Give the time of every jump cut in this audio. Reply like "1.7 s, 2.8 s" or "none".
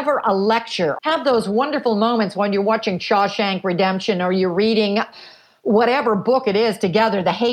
1.0 s